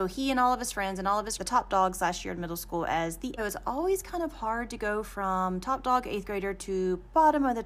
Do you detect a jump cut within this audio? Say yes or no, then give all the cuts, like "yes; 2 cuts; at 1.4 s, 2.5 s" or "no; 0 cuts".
yes; 2 cuts; at 1.4 s, 3.4 s